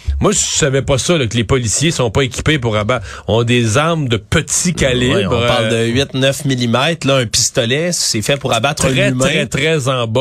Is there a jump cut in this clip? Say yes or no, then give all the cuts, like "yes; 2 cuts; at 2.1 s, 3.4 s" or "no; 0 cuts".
no; 0 cuts